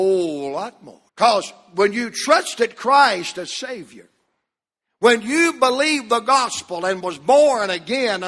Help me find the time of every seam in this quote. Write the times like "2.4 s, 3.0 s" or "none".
1.1 s